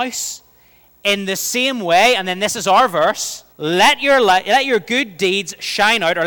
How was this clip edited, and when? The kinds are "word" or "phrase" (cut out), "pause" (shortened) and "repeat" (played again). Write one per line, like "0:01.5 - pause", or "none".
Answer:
0:03.5 - pause